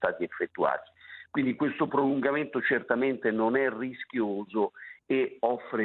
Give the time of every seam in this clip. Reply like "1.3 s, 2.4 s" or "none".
none